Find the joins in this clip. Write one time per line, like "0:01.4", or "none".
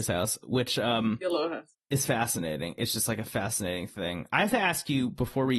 0:01.7